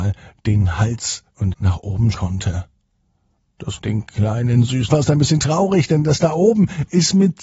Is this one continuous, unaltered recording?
no; 4 cuts; at 1.5 s, 2.1 s, 3.8 s, 4.9 s

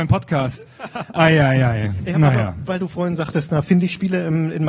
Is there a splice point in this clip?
no; 0 cuts

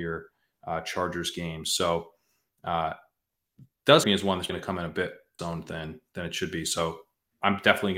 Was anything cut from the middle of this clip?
yes; 3 cuts; at 4.0 s, 4.5 s, 5.4 s

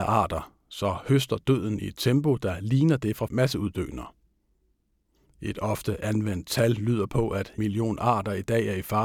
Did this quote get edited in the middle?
yes; 2 cuts; at 3.3 s, 7.6 s

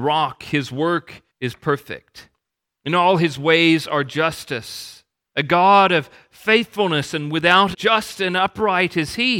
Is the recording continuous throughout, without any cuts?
no; 2 cuts; at 1.3 s, 7.7 s

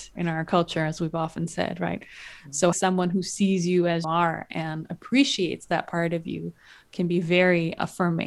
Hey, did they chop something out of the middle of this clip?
yes; 2 cuts; at 2.7 s, 4.0 s

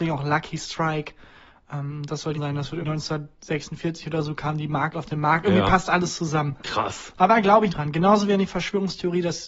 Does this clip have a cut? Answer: yes; 4 cuts; at 2.3 s, 2.8 s, 4.9 s, 7.7 s

